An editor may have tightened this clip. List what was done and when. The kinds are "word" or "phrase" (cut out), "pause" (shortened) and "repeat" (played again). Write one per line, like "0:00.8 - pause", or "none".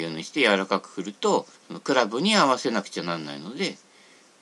0:01.5 - pause